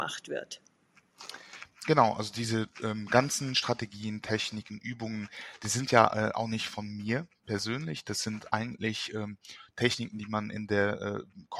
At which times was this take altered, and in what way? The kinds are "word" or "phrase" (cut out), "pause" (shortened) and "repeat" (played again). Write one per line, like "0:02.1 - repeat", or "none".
none